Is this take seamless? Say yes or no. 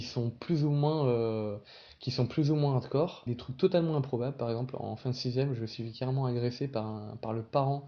no